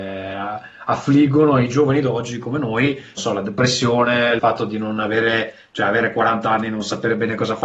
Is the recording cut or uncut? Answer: cut